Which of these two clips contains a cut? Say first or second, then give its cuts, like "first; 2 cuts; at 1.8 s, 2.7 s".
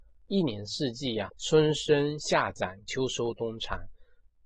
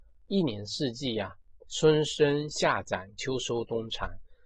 first; 1 cut; at 1.3 s